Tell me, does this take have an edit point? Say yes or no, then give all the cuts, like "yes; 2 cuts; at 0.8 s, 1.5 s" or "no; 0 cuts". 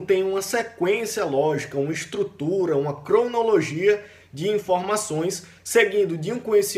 no; 0 cuts